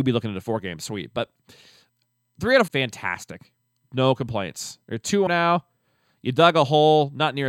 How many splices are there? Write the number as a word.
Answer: two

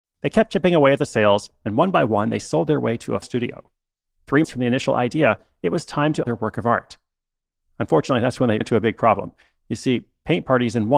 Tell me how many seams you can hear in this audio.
four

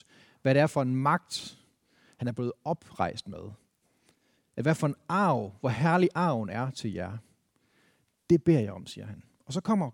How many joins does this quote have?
zero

